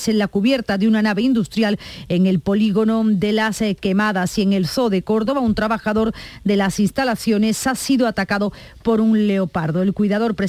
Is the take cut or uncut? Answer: uncut